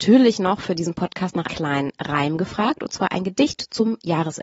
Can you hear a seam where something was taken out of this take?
yes; 1 cut; at 1.5 s

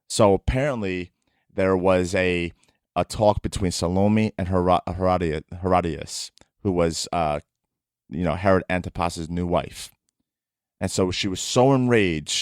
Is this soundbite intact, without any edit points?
yes; 0 cuts

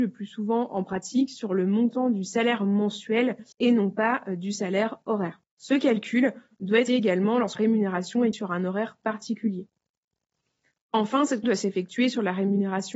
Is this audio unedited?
no; 6 cuts; at 3.5 s, 5.5 s, 6.9 s, 7.5 s, 8.3 s, 11.4 s

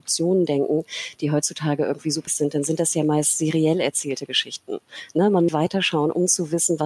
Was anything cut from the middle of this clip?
yes; 2 cuts; at 2.3 s, 5.5 s

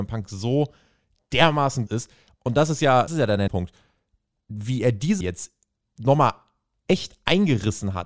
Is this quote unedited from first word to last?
no; 4 cuts; at 1.9 s, 3.1 s, 3.5 s, 5.2 s

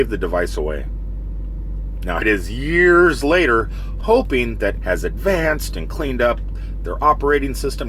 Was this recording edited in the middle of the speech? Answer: yes; 3 cuts; at 2.2 s, 4.0 s, 4.8 s

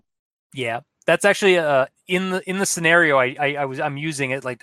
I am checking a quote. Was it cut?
no; 0 cuts

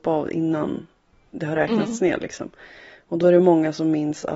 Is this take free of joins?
yes; 0 cuts

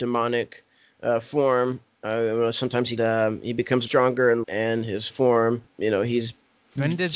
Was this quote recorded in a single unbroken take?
no; 4 cuts; at 3.0 s, 3.9 s, 4.4 s, 5.1 s

